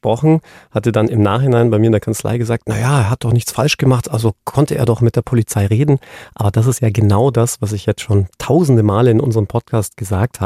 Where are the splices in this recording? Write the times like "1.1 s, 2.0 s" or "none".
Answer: none